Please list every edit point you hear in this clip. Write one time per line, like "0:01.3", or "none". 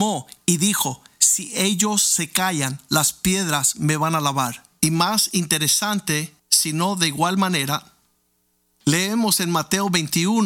0:06.4